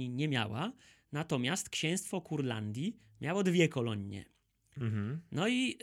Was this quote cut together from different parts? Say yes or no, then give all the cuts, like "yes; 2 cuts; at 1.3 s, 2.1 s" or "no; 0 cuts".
no; 0 cuts